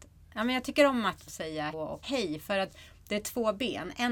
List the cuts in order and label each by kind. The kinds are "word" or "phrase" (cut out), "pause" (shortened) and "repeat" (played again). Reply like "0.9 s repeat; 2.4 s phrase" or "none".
1.3 s phrase; 1.7 s word; 2.0 s word